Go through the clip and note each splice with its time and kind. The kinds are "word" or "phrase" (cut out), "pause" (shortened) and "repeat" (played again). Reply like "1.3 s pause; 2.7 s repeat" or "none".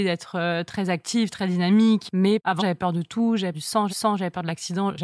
2.6 s word; 3.5 s word; 3.9 s repeat